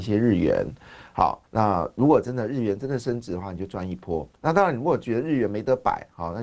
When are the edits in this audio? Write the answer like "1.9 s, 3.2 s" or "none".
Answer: 1.4 s, 4.4 s